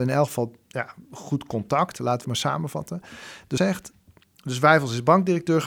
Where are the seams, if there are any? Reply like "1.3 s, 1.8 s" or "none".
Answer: 2.2 s, 3.6 s